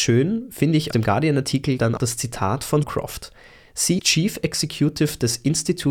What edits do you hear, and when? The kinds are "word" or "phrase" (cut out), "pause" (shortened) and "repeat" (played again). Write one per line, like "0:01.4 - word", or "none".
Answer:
0:00.9 - word
0:02.0 - word
0:02.8 - word
0:04.0 - word